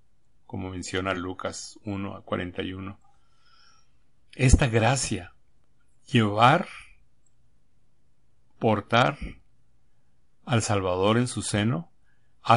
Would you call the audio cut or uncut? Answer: uncut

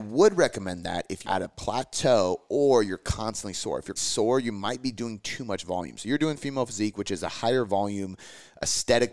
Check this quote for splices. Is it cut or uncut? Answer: cut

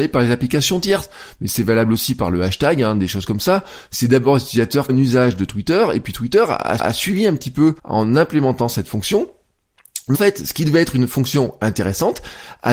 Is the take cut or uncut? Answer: cut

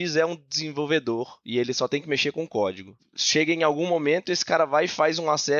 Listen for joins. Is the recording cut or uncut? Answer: uncut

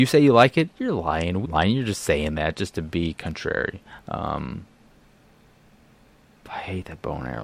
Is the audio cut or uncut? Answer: cut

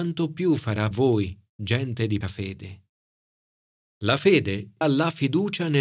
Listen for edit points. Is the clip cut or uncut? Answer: cut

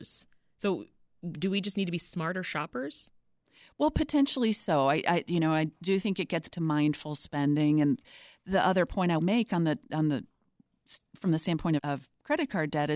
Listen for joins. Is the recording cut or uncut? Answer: cut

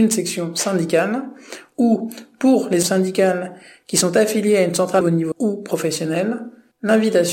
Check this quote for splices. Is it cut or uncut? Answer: cut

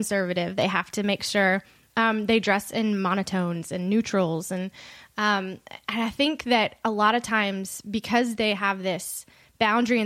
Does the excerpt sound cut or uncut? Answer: uncut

